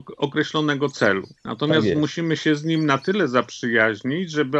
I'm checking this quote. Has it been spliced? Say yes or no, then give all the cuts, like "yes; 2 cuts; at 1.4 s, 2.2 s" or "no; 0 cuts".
yes; 1 cut; at 1.4 s